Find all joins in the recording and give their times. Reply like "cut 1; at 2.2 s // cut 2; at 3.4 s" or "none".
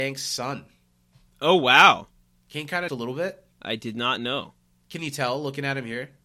cut 1; at 2.9 s // cut 2; at 3.5 s